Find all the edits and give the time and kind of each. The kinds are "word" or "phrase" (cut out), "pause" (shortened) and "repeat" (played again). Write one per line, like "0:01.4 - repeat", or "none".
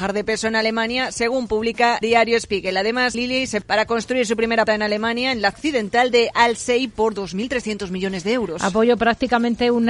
0:02.0 - word
0:03.1 - word
0:03.6 - word
0:04.7 - word
0:05.5 - word